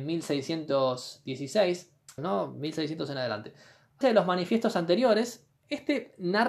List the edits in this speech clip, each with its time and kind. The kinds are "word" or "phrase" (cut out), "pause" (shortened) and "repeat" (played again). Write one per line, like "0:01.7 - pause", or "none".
0:02.2 - phrase
0:04.0 - word